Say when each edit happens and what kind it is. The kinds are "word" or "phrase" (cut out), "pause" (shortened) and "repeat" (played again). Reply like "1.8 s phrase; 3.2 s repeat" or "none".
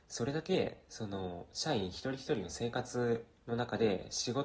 3.4 s pause